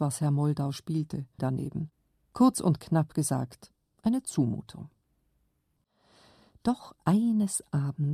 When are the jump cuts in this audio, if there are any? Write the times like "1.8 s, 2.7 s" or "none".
1.4 s

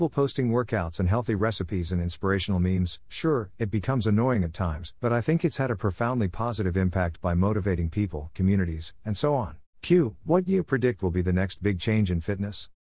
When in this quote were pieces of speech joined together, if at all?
5.0 s, 8.4 s, 9.7 s

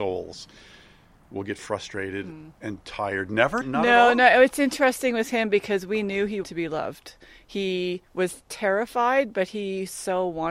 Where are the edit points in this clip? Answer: 3.6 s, 6.4 s

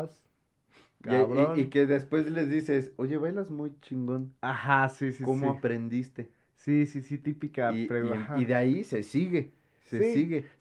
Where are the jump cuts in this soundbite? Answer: 6.5 s

